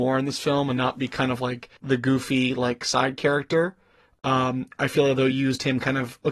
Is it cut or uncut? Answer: cut